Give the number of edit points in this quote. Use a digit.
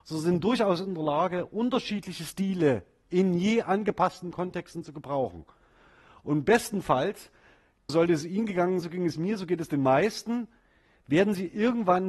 2